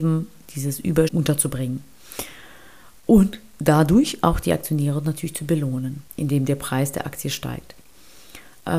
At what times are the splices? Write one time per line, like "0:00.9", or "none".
0:01.1
0:06.1